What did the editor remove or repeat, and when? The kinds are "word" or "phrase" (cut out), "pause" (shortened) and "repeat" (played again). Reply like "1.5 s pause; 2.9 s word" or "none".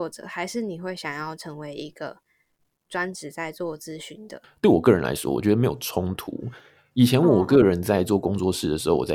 none